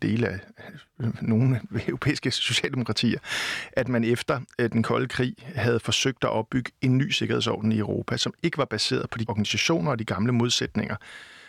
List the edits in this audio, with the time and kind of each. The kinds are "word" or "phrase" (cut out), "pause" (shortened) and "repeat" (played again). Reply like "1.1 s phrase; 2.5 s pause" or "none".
9.3 s word